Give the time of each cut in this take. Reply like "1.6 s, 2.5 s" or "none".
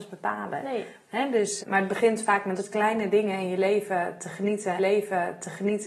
1.6 s, 2.6 s, 4.8 s